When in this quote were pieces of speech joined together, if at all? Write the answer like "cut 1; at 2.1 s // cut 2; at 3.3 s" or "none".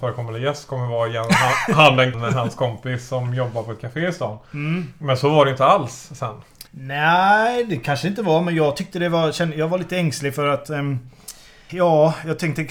cut 1; at 2.1 s // cut 2; at 6.7 s // cut 3; at 11.7 s